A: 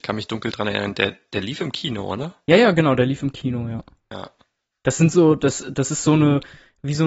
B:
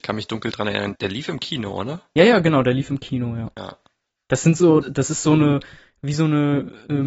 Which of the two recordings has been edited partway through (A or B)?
B